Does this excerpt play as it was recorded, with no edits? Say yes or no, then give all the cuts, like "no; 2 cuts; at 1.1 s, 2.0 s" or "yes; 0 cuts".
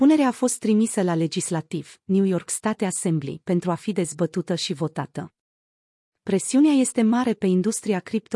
yes; 0 cuts